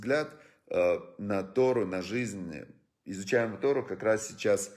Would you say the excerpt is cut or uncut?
uncut